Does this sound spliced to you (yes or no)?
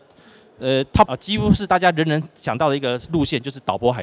yes